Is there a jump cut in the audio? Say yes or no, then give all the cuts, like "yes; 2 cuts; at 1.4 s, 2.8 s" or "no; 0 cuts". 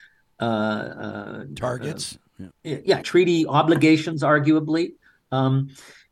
yes; 2 cuts; at 2.5 s, 3.0 s